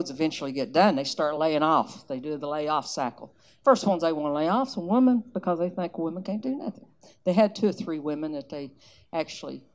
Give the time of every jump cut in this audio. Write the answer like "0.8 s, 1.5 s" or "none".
none